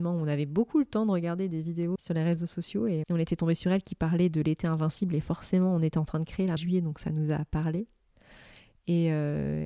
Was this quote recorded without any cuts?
no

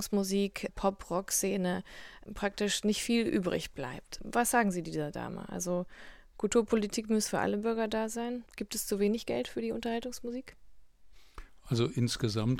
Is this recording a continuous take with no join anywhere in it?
yes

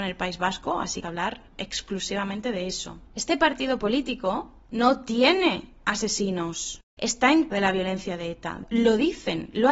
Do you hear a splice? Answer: yes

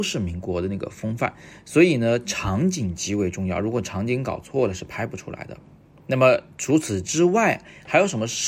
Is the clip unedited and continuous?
yes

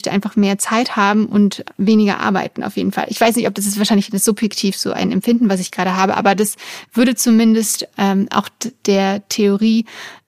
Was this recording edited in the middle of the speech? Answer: no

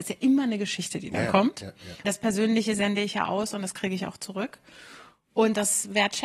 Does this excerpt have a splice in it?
yes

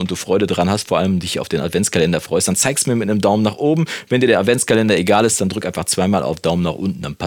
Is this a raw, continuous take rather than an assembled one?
yes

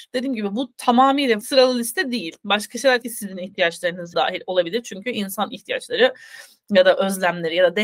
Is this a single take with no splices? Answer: no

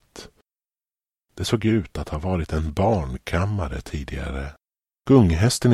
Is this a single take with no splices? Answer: yes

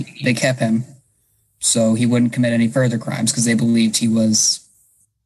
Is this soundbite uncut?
yes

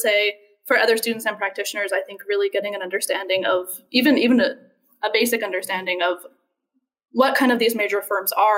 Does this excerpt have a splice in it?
no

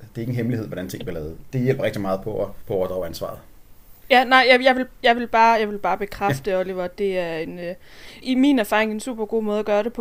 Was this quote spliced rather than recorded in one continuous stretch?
yes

